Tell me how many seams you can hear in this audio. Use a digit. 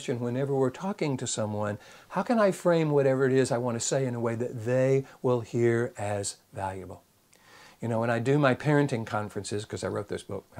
0